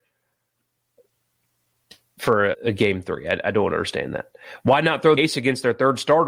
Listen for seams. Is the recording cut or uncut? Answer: cut